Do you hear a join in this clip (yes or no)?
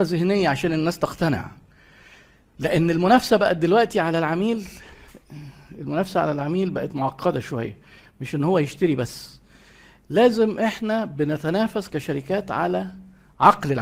no